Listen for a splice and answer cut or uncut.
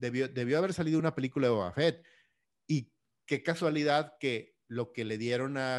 uncut